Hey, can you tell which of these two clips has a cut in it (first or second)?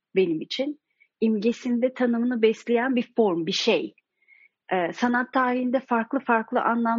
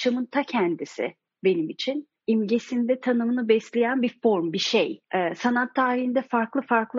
second